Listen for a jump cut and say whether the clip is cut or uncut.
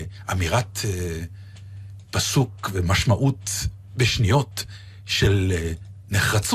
uncut